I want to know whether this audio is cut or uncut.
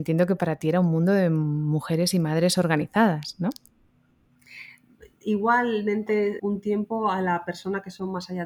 cut